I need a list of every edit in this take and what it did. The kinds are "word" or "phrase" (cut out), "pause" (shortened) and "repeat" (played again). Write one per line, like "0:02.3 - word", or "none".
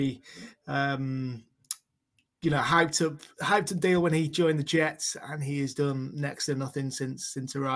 none